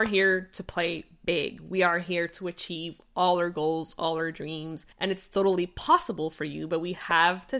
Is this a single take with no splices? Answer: no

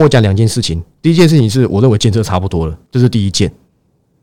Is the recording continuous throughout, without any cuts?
no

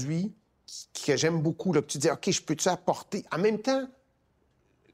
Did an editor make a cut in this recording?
no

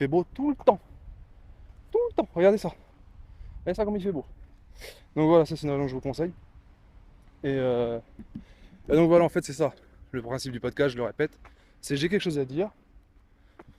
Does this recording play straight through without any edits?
yes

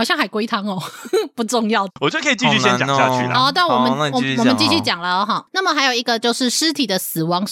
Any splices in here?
yes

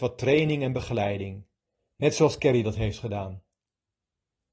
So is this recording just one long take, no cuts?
yes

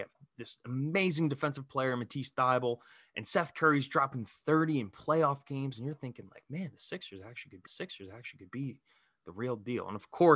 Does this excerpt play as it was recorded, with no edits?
no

